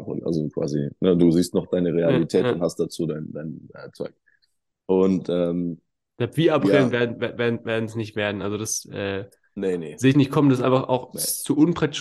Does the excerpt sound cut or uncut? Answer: uncut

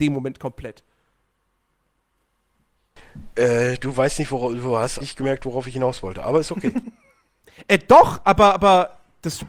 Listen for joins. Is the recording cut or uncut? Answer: cut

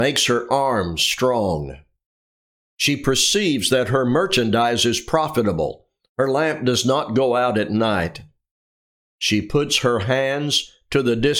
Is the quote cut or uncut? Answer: uncut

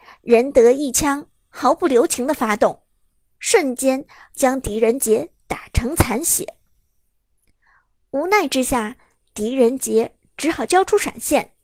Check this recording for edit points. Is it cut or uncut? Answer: uncut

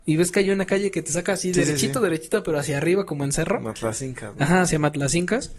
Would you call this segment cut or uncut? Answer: uncut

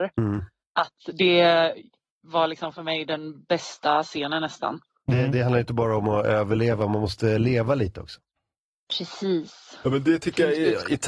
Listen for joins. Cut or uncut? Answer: uncut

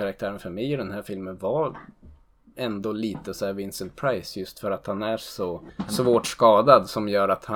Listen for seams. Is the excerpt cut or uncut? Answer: uncut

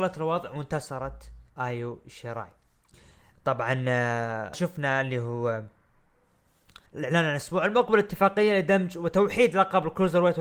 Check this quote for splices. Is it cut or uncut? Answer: cut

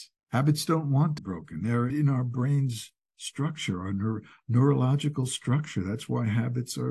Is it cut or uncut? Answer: cut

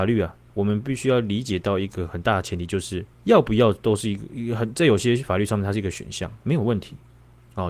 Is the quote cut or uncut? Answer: cut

